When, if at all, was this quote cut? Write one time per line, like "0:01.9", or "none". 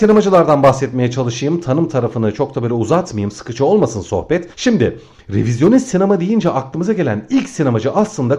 0:04.5

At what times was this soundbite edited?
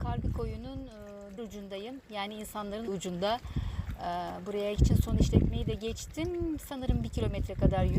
0:01.4
0:02.9
0:04.8

